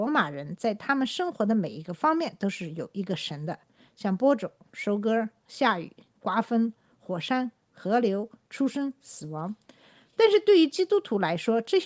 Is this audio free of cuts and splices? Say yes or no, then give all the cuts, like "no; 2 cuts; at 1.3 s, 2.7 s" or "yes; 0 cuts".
yes; 0 cuts